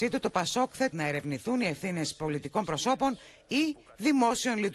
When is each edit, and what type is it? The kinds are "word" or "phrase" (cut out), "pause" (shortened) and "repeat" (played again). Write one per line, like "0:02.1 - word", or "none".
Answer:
0:00.9 - phrase